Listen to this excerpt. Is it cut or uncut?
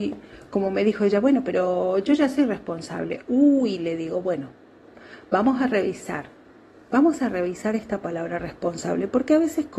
uncut